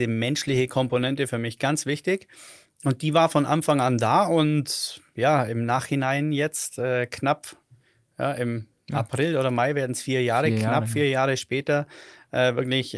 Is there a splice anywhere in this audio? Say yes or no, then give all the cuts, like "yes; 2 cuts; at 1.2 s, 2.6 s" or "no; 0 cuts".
no; 0 cuts